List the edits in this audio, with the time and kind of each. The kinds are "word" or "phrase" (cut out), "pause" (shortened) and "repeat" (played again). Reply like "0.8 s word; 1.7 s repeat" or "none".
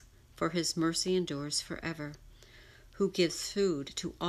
none

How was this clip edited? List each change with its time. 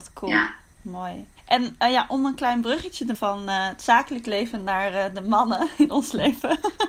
1.4 s pause; 3.1 s word

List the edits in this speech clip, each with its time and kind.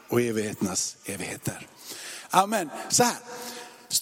none

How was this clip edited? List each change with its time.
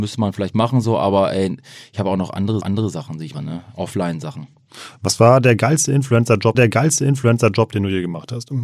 2.6 s repeat; 3.3 s word; 6.5 s repeat

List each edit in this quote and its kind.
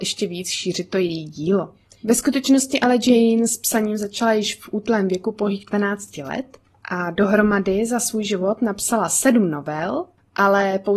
none

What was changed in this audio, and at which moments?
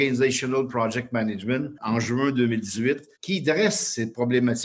3.1 s pause

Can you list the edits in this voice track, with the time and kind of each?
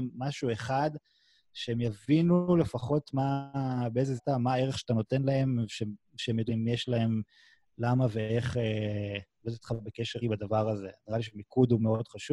4.2 s word; 6.5 s word; 10.2 s word

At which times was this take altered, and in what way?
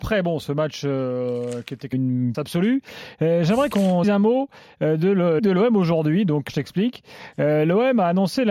1.9 s word; 2.3 s word; 3.7 s word; 4.0 s word; 5.4 s word; 6.5 s word

